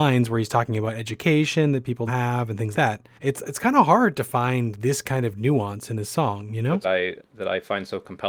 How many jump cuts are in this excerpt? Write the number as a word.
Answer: four